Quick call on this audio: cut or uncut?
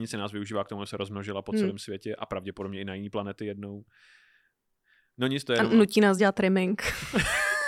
uncut